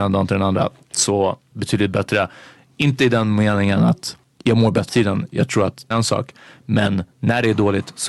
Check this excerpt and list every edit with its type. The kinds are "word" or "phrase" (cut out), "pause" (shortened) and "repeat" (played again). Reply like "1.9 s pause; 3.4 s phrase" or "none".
1.5 s phrase; 4.2 s pause; 4.9 s phrase; 5.9 s word